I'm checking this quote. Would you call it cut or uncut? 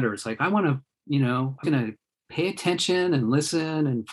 cut